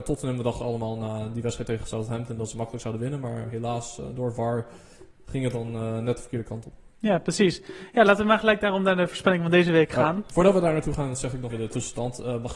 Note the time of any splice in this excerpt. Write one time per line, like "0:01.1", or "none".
0:11.5